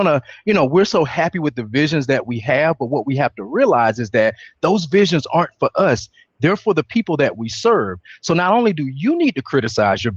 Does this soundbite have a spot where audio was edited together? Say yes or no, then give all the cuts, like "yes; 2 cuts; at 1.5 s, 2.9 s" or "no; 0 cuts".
no; 0 cuts